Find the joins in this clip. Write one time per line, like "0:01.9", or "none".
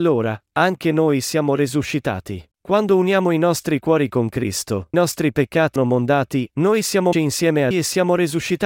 0:02.5
0:04.9
0:05.8
0:07.1
0:07.7